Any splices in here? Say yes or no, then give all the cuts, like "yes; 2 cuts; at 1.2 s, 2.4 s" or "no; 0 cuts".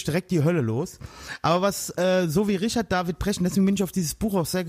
no; 0 cuts